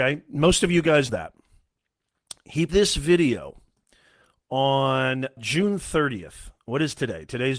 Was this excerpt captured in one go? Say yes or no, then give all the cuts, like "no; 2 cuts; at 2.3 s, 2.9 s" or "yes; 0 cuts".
no; 3 cuts; at 1.1 s, 2.7 s, 5.4 s